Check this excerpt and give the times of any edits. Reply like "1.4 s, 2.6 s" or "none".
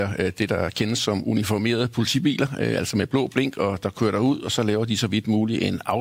none